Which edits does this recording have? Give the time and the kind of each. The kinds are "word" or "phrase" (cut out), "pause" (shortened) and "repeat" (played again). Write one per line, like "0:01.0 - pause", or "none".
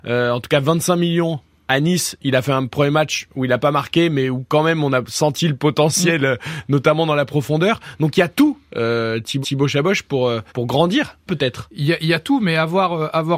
0:09.4 - repeat
0:10.5 - pause
0:11.3 - word